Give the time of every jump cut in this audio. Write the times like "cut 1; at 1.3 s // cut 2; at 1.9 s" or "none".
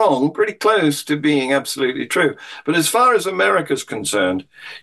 none